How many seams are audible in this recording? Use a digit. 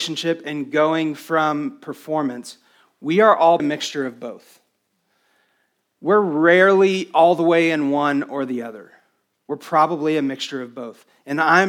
1